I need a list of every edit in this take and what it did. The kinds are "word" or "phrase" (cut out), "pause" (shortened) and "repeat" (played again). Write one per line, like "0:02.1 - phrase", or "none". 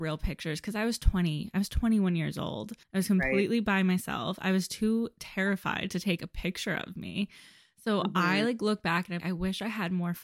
0:02.8 - pause
0:05.9 - phrase
0:09.2 - word

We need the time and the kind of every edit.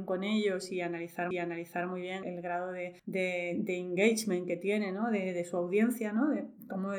0:01.3 - repeat
0:02.2 - word
0:03.0 - pause

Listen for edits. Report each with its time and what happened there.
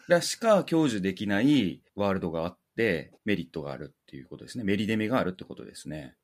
0:03.2 - pause

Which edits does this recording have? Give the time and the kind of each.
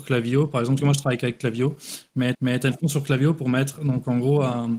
0:02.3 - repeat

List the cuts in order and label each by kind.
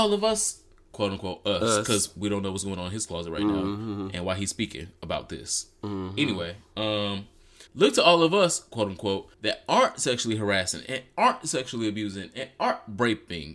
0:07.7 - pause
0:09.3 - pause

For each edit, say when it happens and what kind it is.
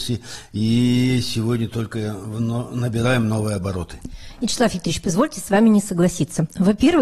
none

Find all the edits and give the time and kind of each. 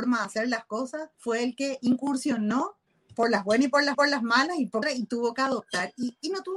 0:01.1 - pause
0:02.9 - pause
0:03.9 - repeat
0:04.8 - phrase

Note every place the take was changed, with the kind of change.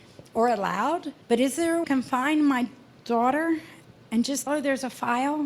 0:01.2 - pause
0:01.8 - phrase
0:03.8 - pause
0:04.5 - word

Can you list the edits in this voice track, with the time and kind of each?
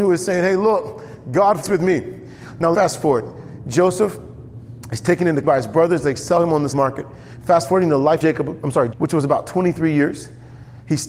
0:01.6 - word
0:02.7 - word
0:05.4 - word
0:06.7 - word
0:08.2 - word
0:08.9 - word

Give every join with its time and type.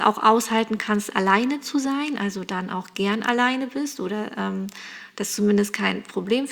none

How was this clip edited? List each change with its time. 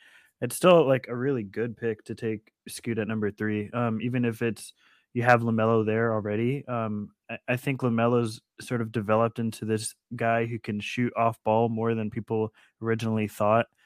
none

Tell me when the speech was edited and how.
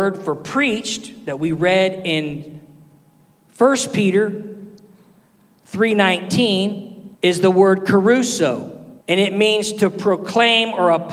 0:07.1 - pause
0:09.0 - pause

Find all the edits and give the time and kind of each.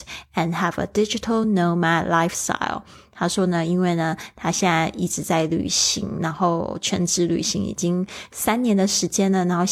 none

